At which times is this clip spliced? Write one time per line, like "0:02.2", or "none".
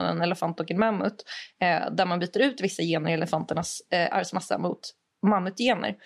none

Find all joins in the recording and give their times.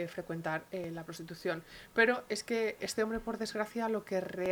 0:02.8

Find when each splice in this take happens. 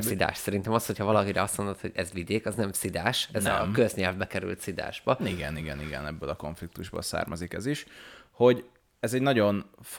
none

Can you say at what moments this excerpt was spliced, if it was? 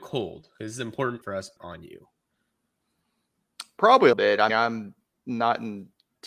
0:01.2
0:01.6
0:04.1
0:04.5
0:05.1

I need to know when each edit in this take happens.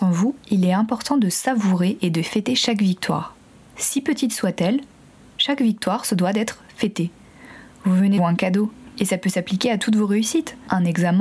0:08.2

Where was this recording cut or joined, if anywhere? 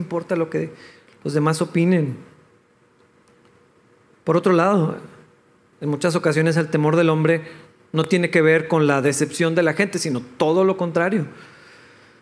none

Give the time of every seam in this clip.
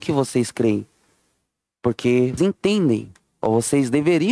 0:02.4

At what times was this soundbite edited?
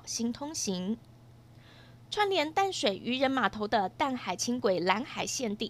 none

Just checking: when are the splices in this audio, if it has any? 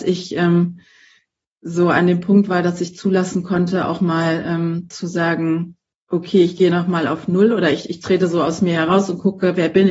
none

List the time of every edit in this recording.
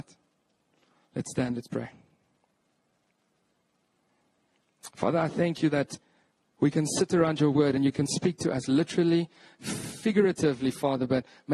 none

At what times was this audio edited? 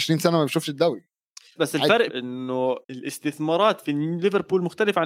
0:01.6
0:02.1
0:02.8

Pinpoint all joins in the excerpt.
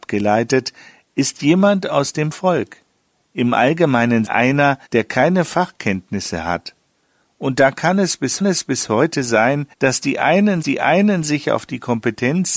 0:04.2
0:04.9
0:08.4
0:09.7
0:10.6

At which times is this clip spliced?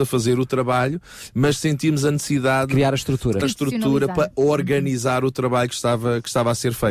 0:03.4

